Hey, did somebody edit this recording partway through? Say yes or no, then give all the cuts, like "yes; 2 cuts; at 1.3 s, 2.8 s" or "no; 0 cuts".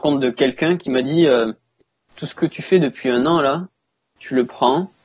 no; 0 cuts